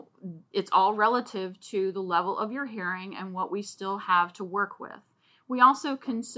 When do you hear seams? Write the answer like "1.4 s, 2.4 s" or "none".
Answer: none